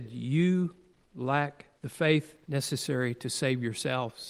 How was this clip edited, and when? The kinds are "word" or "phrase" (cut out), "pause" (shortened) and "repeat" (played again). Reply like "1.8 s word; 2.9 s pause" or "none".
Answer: 1.7 s pause; 2.4 s pause

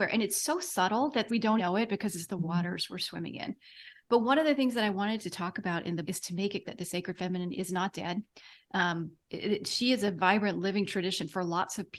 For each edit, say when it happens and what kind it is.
1.3 s word; 1.6 s word; 6.0 s word; 6.6 s word; 9.2 s word

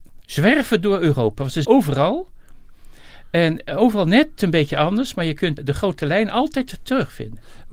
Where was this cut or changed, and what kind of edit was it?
1.6 s word; 5.6 s word

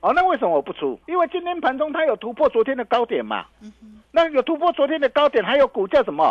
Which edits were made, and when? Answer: 1.0 s pause; 3.5 s pause; 4.0 s pause

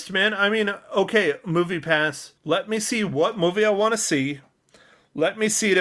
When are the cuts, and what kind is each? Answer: 2.4 s pause

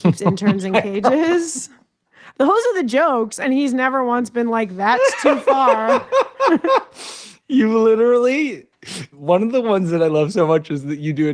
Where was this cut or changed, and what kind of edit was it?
9.1 s pause

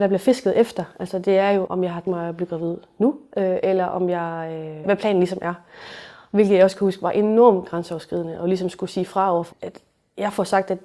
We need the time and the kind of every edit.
1.7 s word; 2.1 s word; 4.8 s word; 9.5 s word

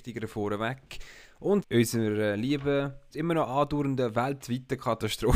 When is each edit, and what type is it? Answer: 1.6 s word; 3.1 s word

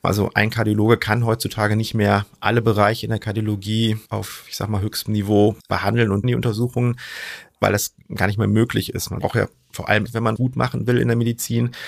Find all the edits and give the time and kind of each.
4.1 s pause; 5.6 s pause; 6.2 s word; 9.2 s word; 10.1 s word; 10.4 s word

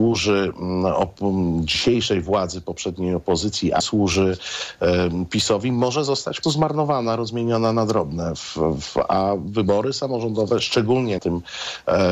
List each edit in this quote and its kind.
3.8 s word; 6.4 s word; 11.2 s word

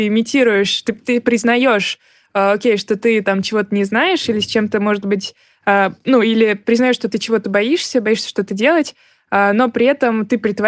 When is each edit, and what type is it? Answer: none

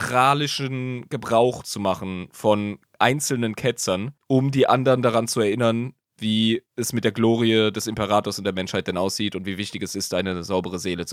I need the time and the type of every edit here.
4.2 s pause; 6.7 s pause

